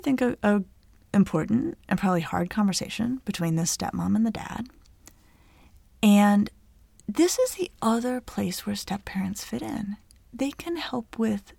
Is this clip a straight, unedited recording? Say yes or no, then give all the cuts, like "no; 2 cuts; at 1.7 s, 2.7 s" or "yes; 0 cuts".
yes; 0 cuts